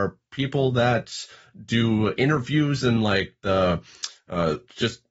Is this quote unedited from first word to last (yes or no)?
yes